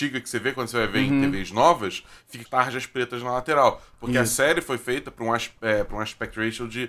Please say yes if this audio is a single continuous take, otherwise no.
no